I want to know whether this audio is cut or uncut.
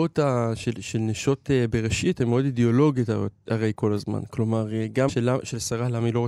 cut